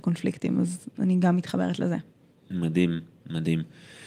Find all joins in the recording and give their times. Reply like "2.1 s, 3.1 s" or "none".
none